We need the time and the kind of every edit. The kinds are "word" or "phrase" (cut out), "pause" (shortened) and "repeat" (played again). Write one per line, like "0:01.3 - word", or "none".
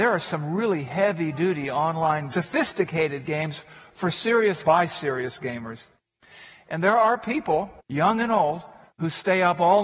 0:02.3 - phrase
0:04.6 - word
0:07.8 - pause